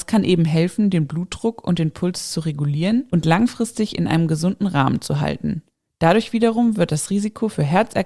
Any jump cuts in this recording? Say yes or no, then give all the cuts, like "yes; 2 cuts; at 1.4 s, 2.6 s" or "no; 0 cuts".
no; 0 cuts